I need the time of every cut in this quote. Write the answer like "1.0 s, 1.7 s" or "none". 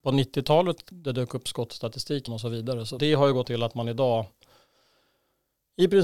0.9 s, 2.3 s, 3.0 s, 3.4 s